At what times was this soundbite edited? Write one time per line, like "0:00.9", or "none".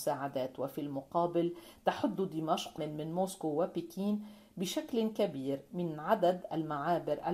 0:02.8